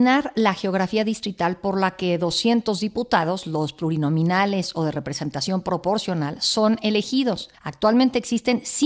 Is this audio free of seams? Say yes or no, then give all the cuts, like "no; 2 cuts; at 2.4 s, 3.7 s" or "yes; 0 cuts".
yes; 0 cuts